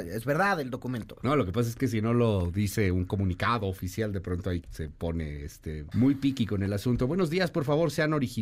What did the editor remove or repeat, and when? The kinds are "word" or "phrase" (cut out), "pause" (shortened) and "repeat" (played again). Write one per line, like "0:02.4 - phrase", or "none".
0:04.6 - word
0:05.9 - word